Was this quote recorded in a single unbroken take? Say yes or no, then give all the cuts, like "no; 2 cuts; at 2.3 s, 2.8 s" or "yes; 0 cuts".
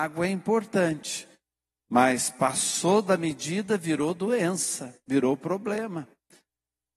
yes; 0 cuts